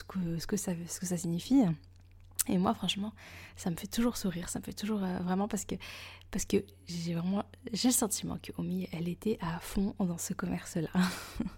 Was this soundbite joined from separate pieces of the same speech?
no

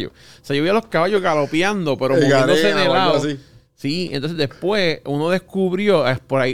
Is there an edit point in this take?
no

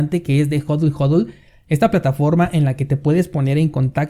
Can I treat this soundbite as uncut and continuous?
yes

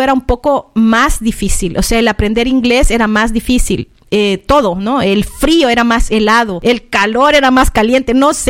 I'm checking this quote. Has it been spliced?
no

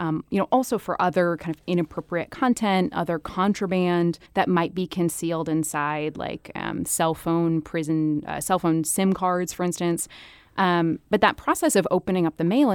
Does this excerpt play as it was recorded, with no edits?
no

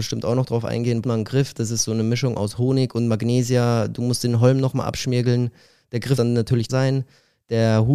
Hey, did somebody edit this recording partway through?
yes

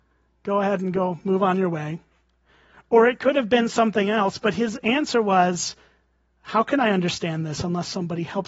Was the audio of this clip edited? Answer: no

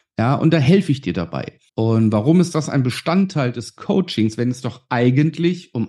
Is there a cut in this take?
yes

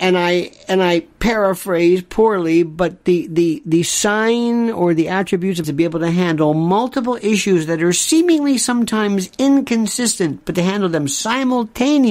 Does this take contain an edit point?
yes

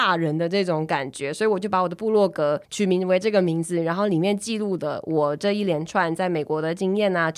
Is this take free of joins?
no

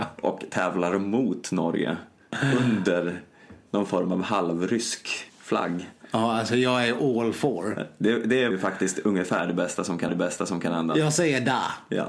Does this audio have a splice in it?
yes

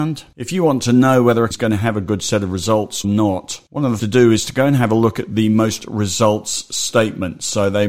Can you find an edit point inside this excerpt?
yes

